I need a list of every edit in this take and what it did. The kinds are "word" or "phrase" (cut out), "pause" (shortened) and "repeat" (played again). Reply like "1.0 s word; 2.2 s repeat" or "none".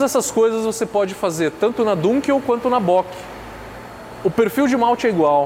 none